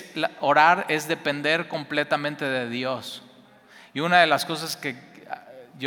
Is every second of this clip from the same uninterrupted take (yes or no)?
yes